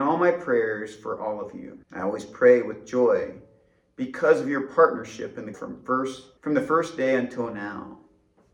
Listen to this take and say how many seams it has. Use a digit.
3